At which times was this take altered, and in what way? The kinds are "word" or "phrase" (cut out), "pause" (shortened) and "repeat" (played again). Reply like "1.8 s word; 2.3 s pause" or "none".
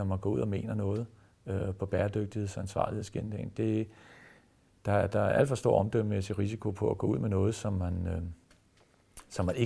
none